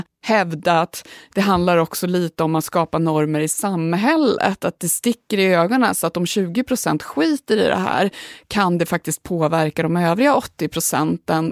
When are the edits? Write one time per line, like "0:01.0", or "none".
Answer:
none

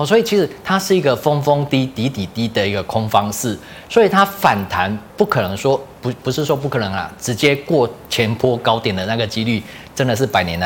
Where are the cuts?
0:05.1

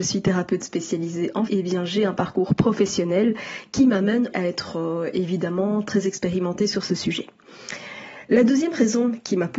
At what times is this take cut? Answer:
0:01.5
0:04.3

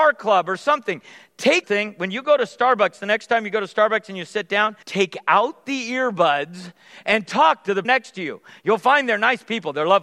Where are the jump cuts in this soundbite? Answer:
0:01.6
0:04.8
0:07.8

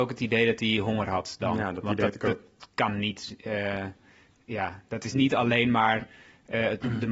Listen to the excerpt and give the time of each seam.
none

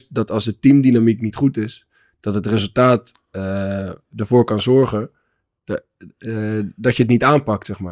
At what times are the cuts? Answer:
none

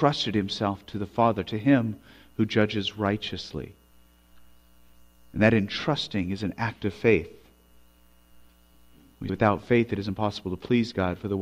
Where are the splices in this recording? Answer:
0:09.3

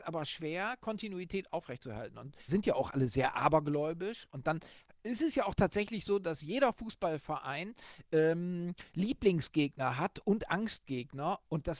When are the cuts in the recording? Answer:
0:02.5

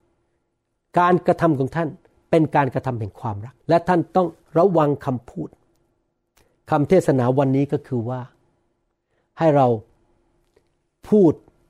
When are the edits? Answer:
0:03.6

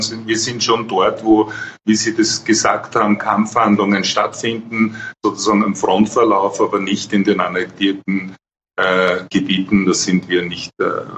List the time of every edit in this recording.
none

